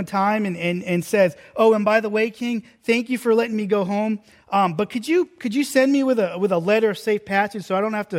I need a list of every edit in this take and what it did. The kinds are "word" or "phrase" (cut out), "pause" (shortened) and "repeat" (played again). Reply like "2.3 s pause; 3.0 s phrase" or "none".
none